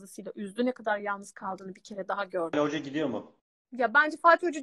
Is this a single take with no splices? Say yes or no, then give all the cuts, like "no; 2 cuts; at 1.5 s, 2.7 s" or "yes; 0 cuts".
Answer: yes; 0 cuts